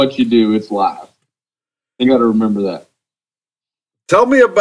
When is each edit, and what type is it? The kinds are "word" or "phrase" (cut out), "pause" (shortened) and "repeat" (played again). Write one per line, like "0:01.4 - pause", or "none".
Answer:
0:02.0 - word

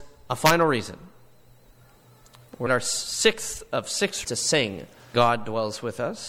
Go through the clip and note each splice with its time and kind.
0:02.7 - word
0:04.2 - word
0:05.1 - word

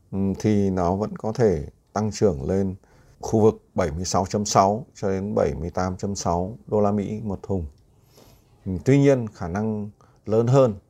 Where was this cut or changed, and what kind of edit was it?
none

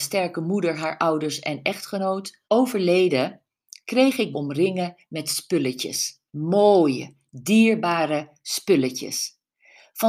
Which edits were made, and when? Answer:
0:02.4 - pause
0:04.3 - phrase
0:06.3 - pause

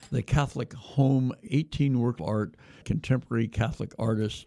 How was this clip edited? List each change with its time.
0:01.5 - word
0:02.2 - word
0:02.8 - word

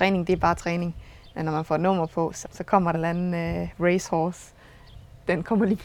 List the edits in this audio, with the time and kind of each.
0:02.4 - word
0:02.9 - phrase

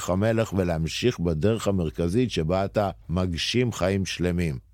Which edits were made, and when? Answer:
0:03.0 - pause

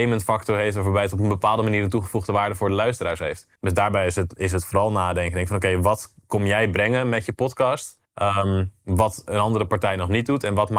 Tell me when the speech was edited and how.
0:03.6 - pause
0:08.0 - pause

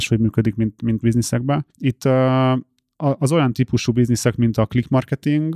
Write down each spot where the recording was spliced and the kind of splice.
0:01.0 - word
0:01.7 - pause

